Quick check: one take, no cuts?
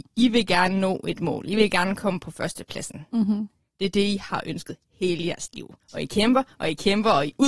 no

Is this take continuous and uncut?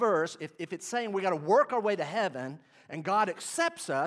yes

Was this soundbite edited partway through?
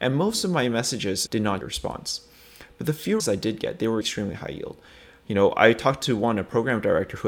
yes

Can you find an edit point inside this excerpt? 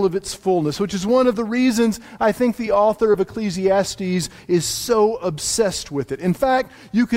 no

